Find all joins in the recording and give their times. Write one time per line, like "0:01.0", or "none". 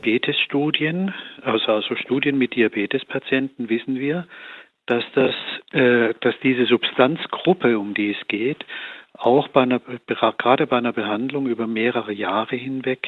none